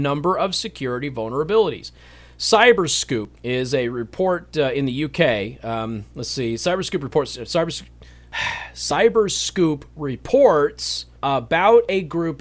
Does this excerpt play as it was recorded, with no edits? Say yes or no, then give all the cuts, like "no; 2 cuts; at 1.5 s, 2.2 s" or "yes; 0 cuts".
no; 3 cuts; at 3.4 s, 8.1 s, 11.2 s